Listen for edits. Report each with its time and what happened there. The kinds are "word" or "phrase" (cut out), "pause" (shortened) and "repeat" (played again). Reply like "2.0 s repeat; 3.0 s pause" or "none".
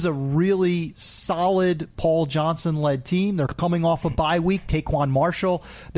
none